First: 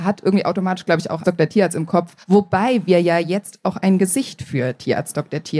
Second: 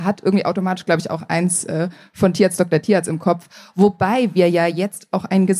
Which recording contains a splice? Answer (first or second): first